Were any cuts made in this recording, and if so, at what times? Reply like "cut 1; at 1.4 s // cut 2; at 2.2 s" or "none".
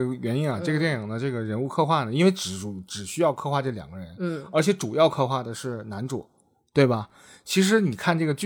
none